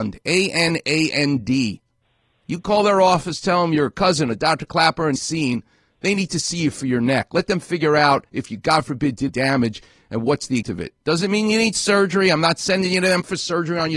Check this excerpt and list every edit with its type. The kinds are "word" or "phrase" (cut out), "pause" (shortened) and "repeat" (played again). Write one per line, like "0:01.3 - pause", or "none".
0:05.2 - phrase
0:09.3 - word
0:10.6 - word